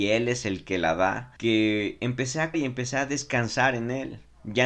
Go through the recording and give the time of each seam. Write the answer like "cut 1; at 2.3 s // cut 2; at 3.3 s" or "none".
cut 1; at 1.4 s // cut 2; at 2.5 s